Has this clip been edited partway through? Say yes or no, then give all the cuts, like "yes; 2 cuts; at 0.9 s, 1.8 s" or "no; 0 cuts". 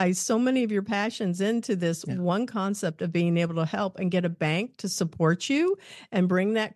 no; 0 cuts